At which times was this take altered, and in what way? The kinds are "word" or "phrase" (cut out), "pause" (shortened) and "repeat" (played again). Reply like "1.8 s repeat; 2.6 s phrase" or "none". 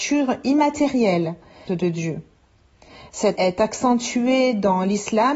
1.7 s word; 3.4 s word